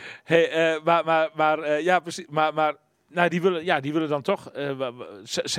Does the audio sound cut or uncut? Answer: uncut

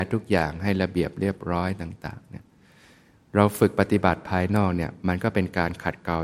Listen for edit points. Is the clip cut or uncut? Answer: uncut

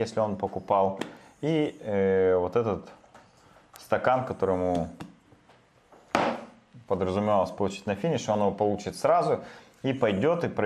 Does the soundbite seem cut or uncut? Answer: uncut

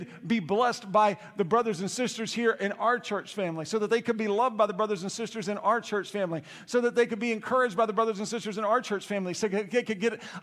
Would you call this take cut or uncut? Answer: uncut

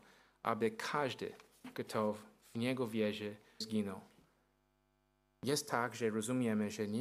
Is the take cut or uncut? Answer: cut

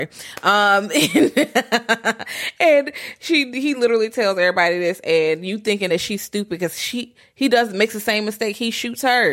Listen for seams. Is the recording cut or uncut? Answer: uncut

